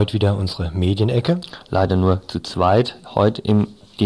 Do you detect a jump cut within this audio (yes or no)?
no